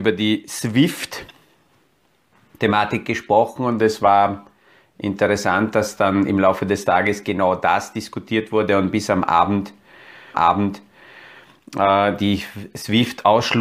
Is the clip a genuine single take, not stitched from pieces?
no; 1 cut; at 10.3 s

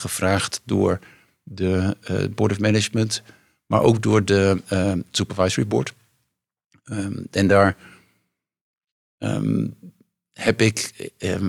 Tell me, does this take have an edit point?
no; 0 cuts

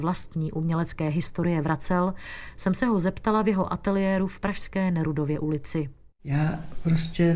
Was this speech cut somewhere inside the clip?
no; 0 cuts

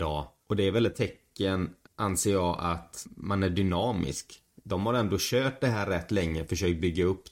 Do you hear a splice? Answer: yes; 1 cut; at 1.9 s

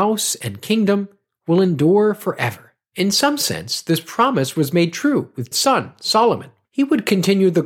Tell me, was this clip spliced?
yes; 1 cut; at 5.5 s

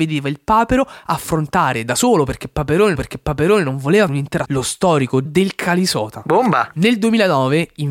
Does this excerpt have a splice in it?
yes; 4 cuts; at 2.9 s, 4.1 s, 4.4 s, 5.2 s

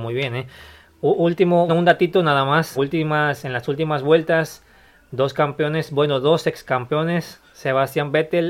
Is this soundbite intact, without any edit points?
no; 2 cuts; at 1.7 s, 2.7 s

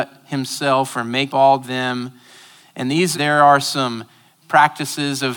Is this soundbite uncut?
no; 4 cuts; at 1.3 s, 1.6 s, 3.1 s, 4.4 s

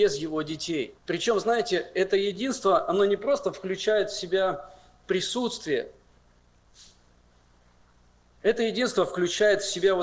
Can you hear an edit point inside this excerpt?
yes; 1 cut; at 1.0 s

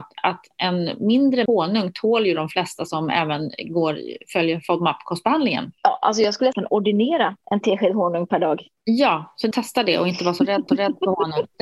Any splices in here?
yes; 5 cuts; at 1.5 s, 5.8 s, 6.5 s, 9.5 s, 10.7 s

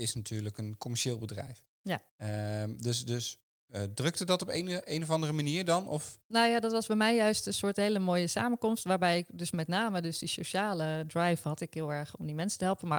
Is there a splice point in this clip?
no; 0 cuts

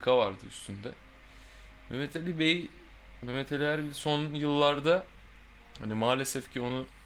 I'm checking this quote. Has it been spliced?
no; 0 cuts

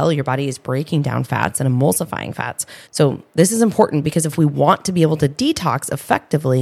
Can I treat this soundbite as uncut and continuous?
no; 1 cut; at 2.9 s

